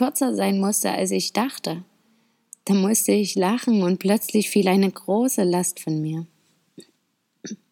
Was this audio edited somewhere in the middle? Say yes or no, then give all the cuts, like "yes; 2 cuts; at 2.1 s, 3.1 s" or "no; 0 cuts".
no; 0 cuts